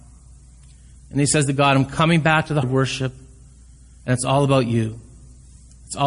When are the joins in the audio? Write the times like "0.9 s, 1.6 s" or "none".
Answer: 2.6 s